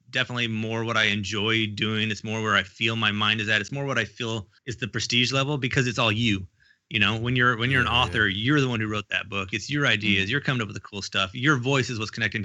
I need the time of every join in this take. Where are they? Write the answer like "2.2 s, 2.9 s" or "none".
4.6 s